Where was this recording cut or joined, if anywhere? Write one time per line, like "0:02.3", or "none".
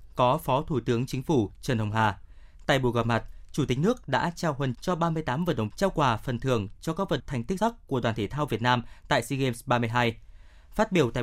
0:04.7
0:05.7
0:07.2
0:07.6